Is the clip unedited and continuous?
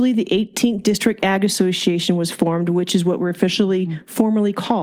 yes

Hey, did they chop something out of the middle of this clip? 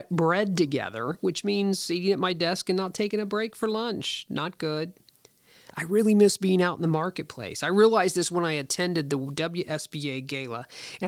no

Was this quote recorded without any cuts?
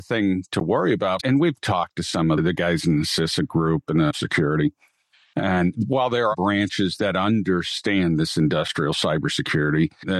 no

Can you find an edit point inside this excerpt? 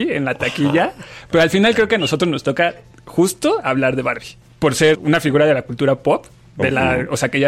yes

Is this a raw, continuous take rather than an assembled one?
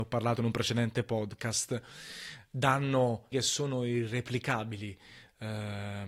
no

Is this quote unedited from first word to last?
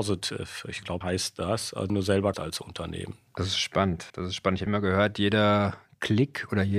no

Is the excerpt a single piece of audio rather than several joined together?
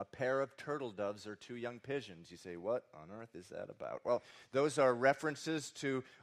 yes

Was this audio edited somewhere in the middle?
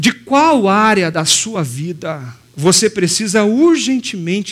no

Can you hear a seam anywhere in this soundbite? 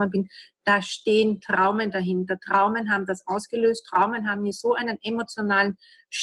no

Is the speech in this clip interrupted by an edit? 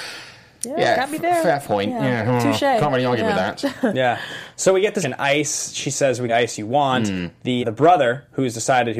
yes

